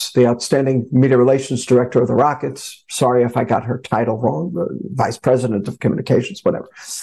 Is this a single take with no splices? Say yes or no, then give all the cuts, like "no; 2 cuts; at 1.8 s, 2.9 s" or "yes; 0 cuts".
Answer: yes; 0 cuts